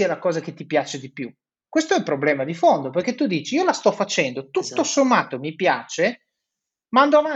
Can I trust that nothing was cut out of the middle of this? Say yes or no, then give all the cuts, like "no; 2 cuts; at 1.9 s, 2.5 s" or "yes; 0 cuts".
yes; 0 cuts